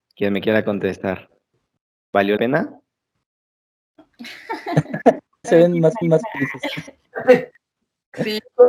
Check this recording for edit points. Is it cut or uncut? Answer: cut